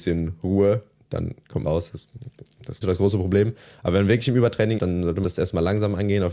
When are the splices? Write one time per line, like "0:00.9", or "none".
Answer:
0:01.6
0:02.8
0:04.8
0:05.2